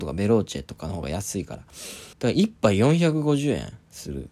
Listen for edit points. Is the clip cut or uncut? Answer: cut